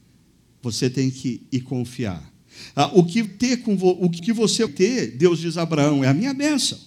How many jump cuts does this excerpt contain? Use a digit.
4